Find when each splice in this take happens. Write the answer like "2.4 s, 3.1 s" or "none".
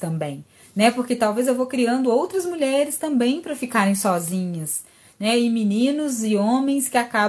none

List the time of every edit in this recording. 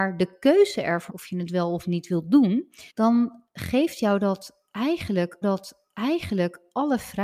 1.1 s, 2.9 s, 5.4 s

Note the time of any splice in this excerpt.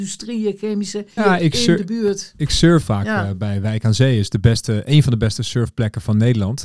1.2 s, 2.8 s

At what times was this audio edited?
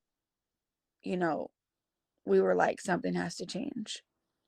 none

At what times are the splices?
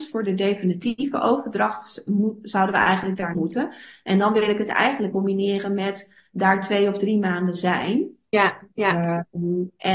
3.3 s, 5.1 s, 8.7 s

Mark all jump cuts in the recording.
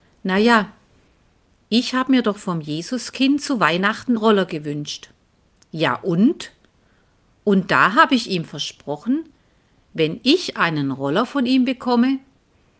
4.2 s

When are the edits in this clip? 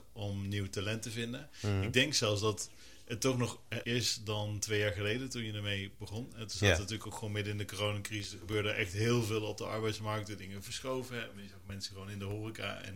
3.8 s

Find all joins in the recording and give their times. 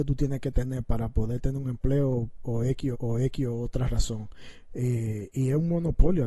2.9 s

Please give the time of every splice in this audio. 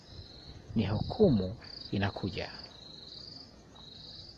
1.9 s

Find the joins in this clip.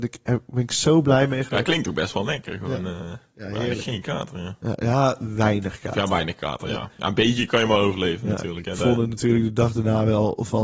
none

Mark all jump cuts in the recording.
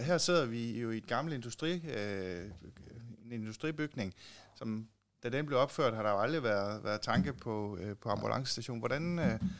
none

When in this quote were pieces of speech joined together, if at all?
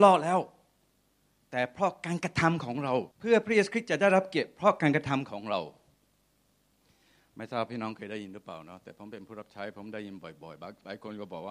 3.1 s

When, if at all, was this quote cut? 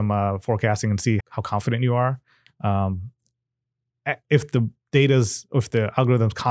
1.2 s

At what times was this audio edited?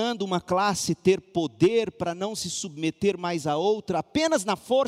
none

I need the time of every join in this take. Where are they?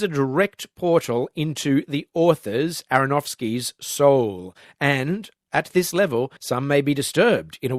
6.4 s

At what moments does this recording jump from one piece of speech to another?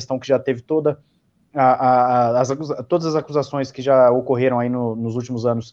none

